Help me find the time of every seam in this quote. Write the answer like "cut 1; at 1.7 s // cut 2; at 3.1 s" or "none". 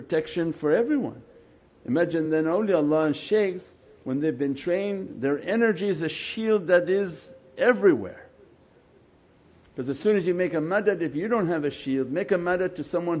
none